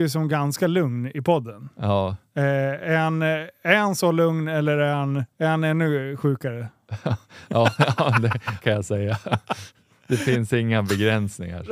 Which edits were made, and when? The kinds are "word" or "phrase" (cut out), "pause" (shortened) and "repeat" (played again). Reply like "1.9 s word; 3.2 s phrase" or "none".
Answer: 5.3 s pause; 8.6 s phrase